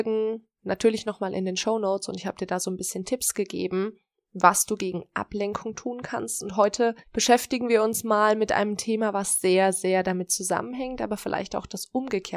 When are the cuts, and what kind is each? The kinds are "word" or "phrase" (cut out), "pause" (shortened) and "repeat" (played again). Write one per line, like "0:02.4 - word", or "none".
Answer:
0:07.0 - pause